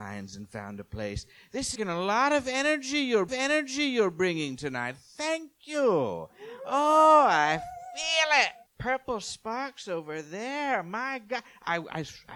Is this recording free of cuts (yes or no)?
no